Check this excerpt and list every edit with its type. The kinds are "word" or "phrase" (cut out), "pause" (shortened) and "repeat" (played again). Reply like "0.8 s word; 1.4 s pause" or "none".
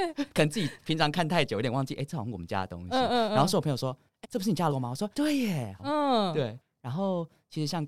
4.2 s word; 4.7 s word; 5.1 s pause; 5.8 s phrase